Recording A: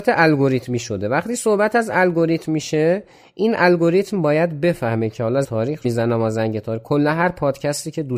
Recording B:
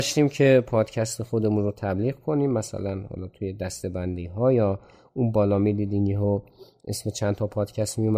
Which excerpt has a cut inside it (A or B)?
A